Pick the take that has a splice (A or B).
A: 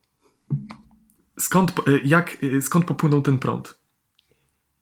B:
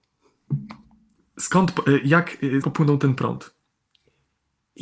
B